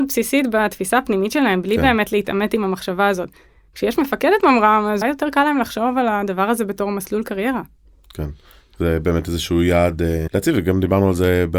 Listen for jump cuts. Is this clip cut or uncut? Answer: cut